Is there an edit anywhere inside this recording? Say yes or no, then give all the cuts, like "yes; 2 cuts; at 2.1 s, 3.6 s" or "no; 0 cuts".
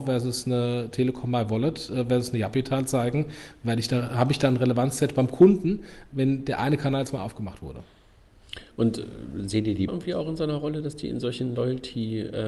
yes; 1 cut; at 9.9 s